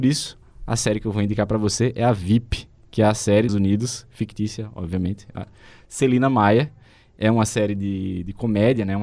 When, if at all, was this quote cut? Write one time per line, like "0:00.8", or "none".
0:03.5

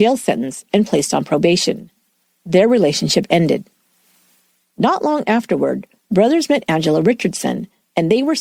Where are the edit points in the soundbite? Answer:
none

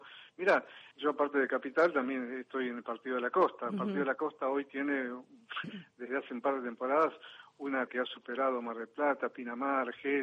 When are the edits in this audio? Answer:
0:00.9
0:07.9

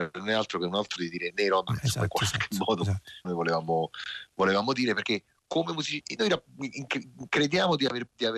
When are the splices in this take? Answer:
0:01.0
0:01.3
0:01.7
0:03.2
0:06.2

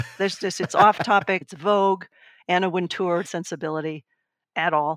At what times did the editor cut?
0:01.4
0:03.2

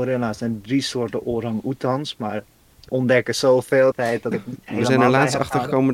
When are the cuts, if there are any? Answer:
0:02.9
0:03.9
0:04.3

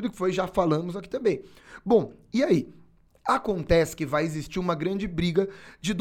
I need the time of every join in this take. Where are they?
0:03.1

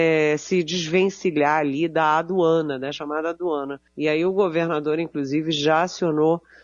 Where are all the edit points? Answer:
0:03.9

